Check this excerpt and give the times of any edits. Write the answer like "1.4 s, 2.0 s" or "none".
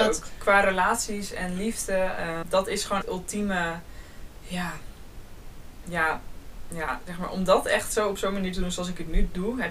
2.4 s, 3.0 s